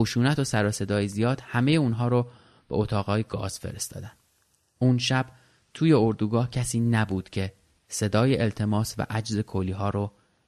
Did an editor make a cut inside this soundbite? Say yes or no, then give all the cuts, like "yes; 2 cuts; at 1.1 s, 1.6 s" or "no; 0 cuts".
no; 0 cuts